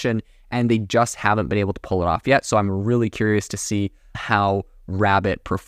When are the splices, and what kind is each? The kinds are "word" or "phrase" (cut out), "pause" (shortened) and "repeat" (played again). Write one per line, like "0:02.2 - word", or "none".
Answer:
0:04.1 - word